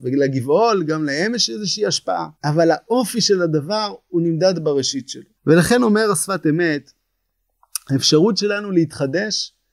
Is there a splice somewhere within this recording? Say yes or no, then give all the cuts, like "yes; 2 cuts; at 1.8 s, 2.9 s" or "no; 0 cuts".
yes; 2 cuts; at 2.3 s, 5.4 s